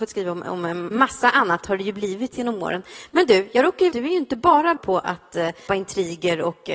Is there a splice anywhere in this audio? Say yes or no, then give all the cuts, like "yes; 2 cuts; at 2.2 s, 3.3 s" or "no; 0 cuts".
yes; 4 cuts; at 0.9 s, 3.9 s, 4.8 s, 5.7 s